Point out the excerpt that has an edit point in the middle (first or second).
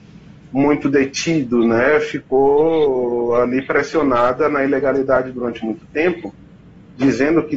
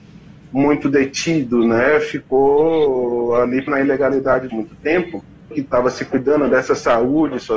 second